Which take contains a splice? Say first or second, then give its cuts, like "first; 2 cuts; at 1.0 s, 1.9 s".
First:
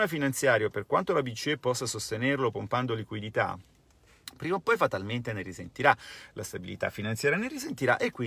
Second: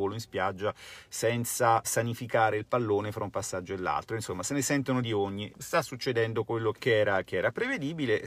second; 4 cuts; at 1.8 s, 5.0 s, 5.5 s, 6.7 s